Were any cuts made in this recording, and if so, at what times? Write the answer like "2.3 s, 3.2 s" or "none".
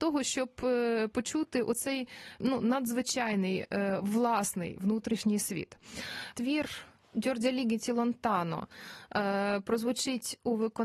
none